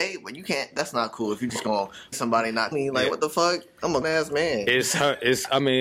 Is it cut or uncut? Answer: cut